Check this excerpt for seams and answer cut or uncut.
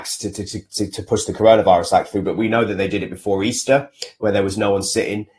uncut